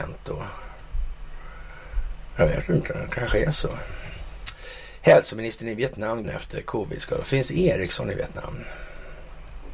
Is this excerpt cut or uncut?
cut